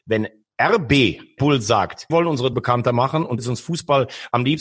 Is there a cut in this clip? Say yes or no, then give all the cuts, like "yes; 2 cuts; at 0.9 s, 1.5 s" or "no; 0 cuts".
yes; 4 cuts; at 1.4 s, 2.1 s, 2.5 s, 3.4 s